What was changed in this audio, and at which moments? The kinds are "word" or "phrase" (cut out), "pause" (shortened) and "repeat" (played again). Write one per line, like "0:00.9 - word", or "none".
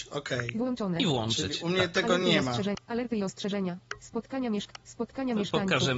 none

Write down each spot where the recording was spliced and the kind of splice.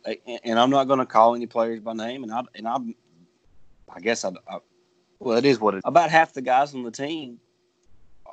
0:05.8 - word

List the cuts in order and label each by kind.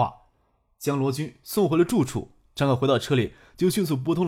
none

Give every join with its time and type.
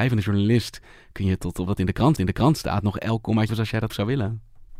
0:01.7 - phrase
0:02.2 - repeat
0:03.5 - word
0:03.9 - word

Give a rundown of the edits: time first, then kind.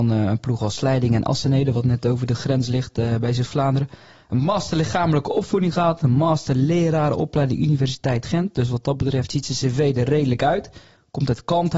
none

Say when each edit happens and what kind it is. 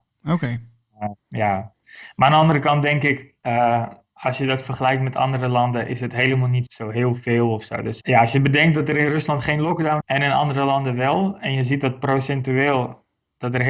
0:01.2 - pause
0:03.4 - pause
0:06.7 - word
0:08.0 - word
0:10.0 - word

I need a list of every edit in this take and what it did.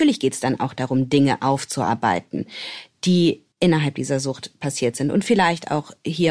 0:03.5 - pause

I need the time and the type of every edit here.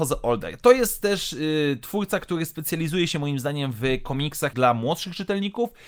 0:04.5 - word

